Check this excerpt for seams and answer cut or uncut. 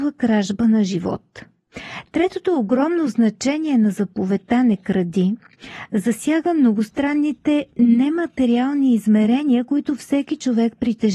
uncut